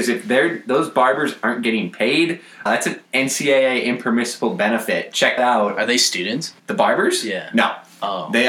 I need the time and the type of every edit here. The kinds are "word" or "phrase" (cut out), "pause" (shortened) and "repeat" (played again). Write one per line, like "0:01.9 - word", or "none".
0:02.7 - word
0:03.0 - pause
0:05.4 - word
0:06.6 - pause